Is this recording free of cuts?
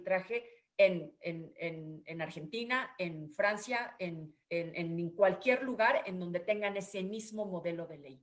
no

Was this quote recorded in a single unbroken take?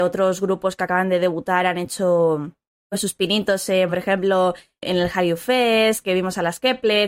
yes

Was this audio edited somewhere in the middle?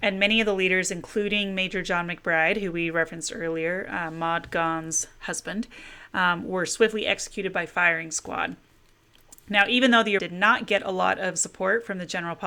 yes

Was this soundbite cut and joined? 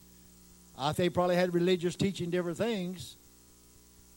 yes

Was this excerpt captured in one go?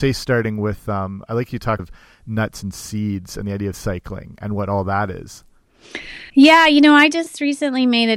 no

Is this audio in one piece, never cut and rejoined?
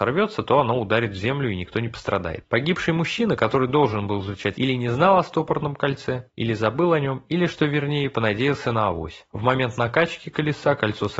no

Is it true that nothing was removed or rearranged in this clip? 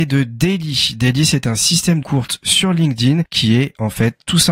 no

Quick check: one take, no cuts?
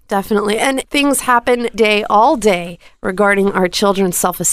no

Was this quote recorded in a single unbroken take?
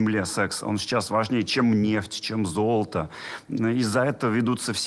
yes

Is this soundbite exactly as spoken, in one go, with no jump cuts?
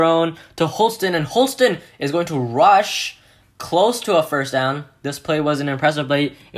yes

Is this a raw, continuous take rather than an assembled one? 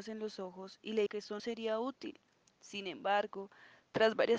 no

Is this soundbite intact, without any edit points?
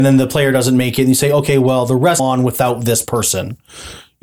no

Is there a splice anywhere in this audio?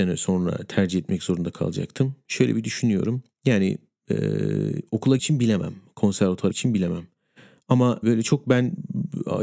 yes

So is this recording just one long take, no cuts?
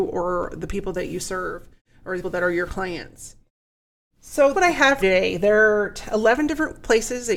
no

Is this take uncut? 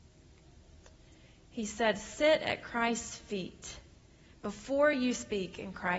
yes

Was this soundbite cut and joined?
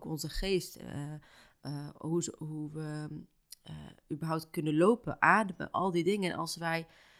no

